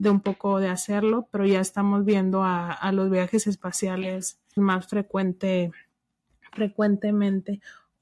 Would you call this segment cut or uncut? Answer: cut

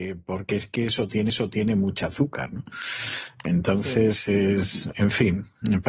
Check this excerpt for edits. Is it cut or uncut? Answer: cut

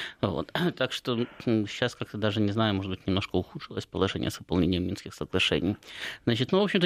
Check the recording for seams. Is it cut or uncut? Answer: uncut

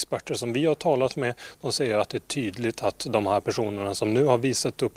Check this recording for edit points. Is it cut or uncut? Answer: uncut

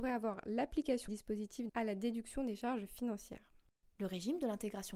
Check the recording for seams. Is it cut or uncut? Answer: cut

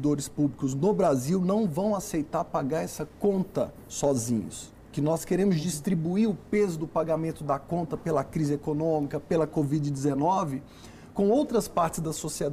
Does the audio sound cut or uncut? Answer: uncut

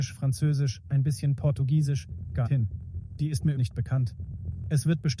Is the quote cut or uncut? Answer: cut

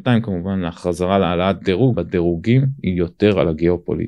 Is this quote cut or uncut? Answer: cut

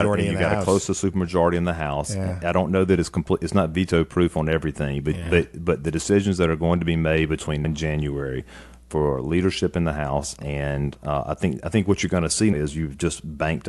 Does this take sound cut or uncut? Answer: cut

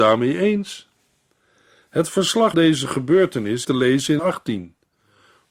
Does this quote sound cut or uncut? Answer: cut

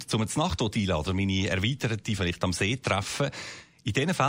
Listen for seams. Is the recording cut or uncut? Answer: cut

